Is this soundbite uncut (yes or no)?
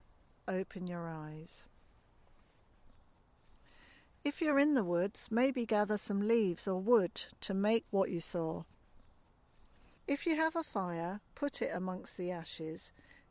yes